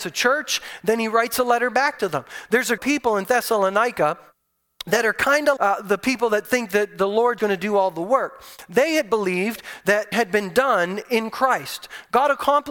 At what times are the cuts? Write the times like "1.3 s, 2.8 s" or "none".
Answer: 2.8 s, 5.6 s, 7.4 s, 10.1 s